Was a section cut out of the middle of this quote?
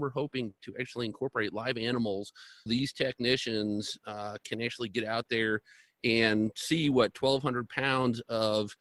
yes; 1 cut; at 2.7 s

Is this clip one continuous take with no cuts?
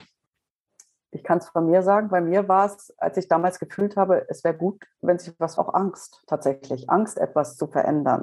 no; 1 cut; at 5.6 s

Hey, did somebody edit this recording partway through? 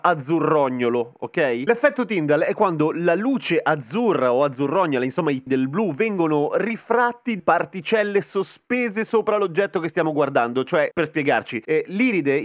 yes; 2 cuts; at 5.5 s, 7.4 s

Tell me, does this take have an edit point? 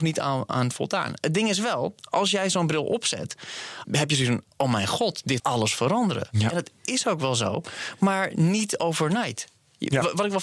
yes; 3 cuts; at 3.8 s, 4.5 s, 5.4 s

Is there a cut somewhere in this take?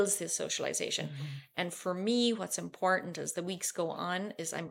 no; 0 cuts

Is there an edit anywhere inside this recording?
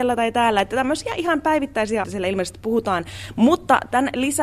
yes; 1 cut; at 2.0 s

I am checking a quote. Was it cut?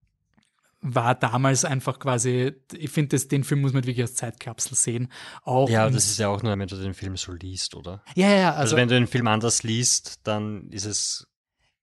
yes; 1 cut; at 6.5 s

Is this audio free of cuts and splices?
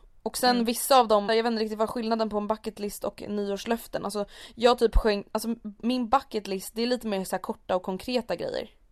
no; 1 cut; at 1.3 s

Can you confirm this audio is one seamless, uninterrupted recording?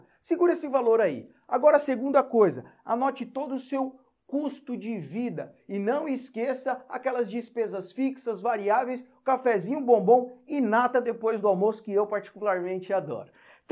yes; 0 cuts

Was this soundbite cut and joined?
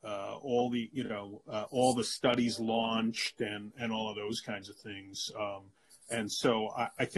no; 0 cuts

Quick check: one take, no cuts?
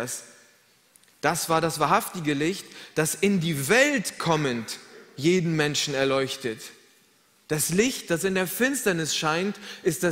yes; 0 cuts

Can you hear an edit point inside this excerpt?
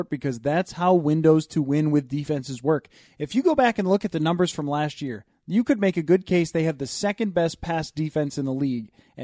no; 0 cuts

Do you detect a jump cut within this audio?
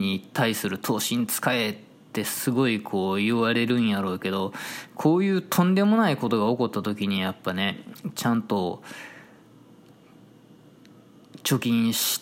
no; 0 cuts

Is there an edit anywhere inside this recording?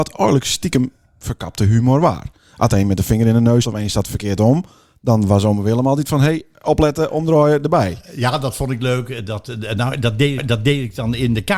yes; 2 cuts; at 3.6 s, 10.4 s

